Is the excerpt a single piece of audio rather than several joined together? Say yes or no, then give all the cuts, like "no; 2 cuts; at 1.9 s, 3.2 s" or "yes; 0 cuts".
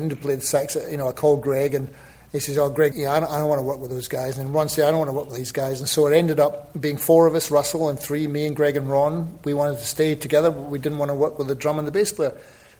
no; 1 cut; at 2.9 s